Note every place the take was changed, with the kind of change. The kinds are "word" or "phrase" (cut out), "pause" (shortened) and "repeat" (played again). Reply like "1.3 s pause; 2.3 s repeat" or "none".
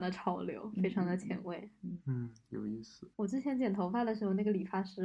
3.1 s pause